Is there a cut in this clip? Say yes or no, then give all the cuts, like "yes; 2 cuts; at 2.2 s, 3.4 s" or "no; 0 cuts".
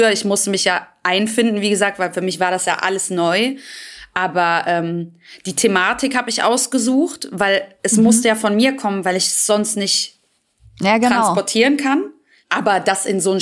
no; 0 cuts